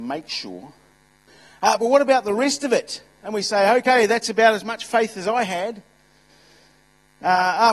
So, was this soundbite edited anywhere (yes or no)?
no